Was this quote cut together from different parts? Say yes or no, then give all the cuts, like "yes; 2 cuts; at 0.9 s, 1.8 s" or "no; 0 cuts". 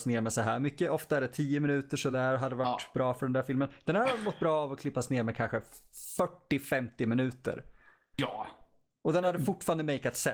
no; 0 cuts